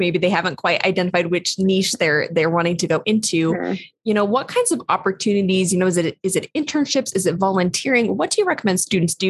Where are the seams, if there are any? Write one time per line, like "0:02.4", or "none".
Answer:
none